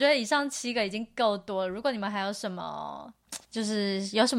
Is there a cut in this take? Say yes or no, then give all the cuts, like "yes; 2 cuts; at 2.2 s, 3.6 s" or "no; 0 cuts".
yes; 1 cut; at 3.5 s